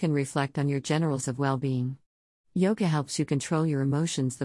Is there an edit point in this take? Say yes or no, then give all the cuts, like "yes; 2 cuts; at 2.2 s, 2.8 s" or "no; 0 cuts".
yes; 1 cut; at 1.2 s